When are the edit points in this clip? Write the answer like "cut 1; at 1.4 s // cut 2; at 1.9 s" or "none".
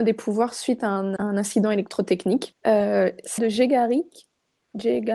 cut 1; at 1.2 s // cut 2; at 3.4 s